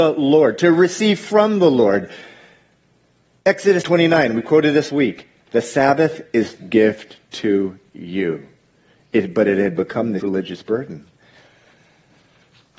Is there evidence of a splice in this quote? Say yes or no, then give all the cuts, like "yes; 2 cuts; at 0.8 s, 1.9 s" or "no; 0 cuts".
yes; 4 cuts; at 3.8 s, 4.9 s, 6.6 s, 10.2 s